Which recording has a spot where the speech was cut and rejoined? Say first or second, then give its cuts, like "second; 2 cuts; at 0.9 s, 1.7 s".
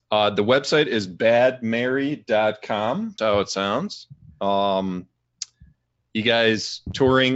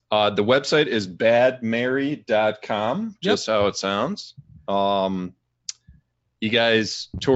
first; 1 cut; at 3.2 s